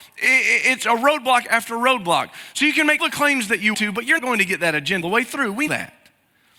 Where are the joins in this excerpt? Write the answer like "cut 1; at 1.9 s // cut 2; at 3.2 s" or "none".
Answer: cut 1; at 3.0 s // cut 2; at 3.7 s // cut 3; at 4.2 s // cut 4; at 5.0 s // cut 5; at 5.7 s